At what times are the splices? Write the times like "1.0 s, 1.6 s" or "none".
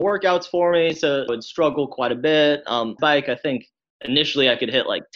1.3 s, 3.0 s